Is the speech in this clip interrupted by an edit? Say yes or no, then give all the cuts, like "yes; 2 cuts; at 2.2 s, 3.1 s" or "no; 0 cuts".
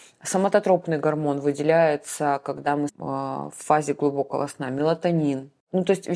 yes; 1 cut; at 2.9 s